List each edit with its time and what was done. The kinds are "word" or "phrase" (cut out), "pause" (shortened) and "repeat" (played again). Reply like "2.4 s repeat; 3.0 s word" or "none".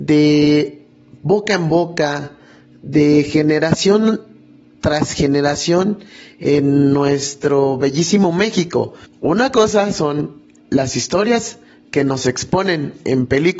9.1 s pause